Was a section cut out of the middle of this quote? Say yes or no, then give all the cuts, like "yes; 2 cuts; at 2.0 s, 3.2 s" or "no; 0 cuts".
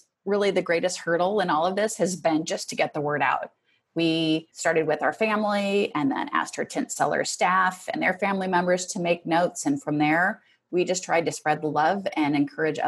no; 0 cuts